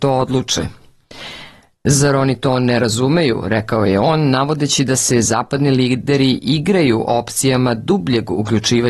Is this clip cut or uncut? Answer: uncut